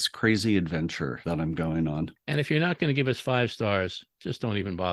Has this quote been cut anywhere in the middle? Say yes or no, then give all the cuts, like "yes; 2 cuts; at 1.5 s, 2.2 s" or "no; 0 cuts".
no; 0 cuts